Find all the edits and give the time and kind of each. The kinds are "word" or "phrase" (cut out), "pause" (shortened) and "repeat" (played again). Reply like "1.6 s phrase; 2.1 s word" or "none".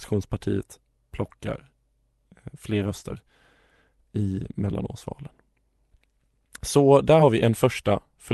none